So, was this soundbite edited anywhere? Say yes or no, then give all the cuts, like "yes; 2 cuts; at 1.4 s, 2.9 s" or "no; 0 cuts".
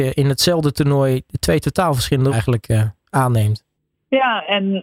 yes; 2 cuts; at 2.3 s, 3.8 s